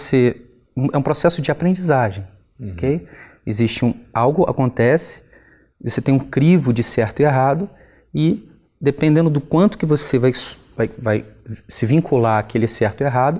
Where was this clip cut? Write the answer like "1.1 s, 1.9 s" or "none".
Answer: none